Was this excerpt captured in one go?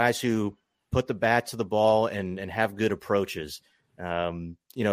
yes; 0 cuts

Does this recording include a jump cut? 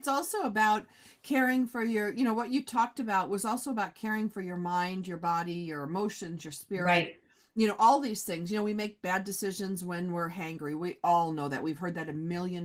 no; 0 cuts

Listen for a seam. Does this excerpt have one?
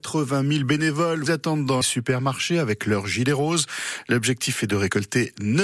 yes; 2 cuts; at 1.3 s, 1.8 s

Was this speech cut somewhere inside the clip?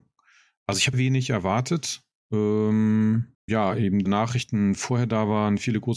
yes; 3 cuts; at 0.9 s, 3.5 s, 4.1 s

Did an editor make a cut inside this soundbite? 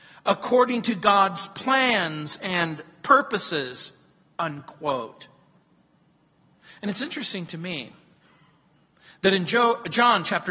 no; 0 cuts

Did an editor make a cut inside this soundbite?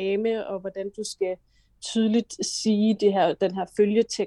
no; 0 cuts

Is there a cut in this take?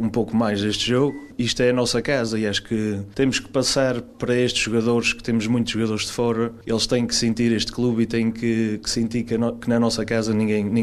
no; 0 cuts

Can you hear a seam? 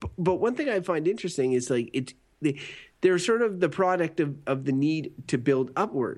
no; 0 cuts

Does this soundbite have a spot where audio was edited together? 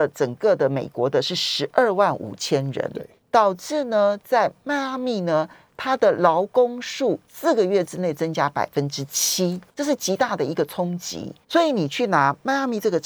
yes; 4 cuts; at 3.2 s, 7.3 s, 9.7 s, 11.4 s

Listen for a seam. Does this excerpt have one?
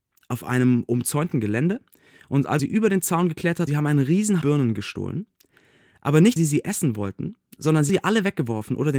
yes; 5 cuts; at 2.6 s, 3.7 s, 4.4 s, 6.4 s, 7.9 s

